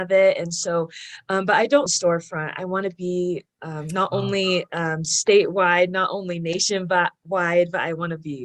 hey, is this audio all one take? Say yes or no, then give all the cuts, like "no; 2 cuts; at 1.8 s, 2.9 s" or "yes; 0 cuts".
no; 1 cut; at 1.9 s